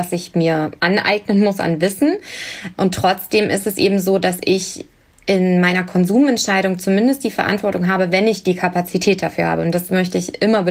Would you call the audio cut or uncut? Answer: uncut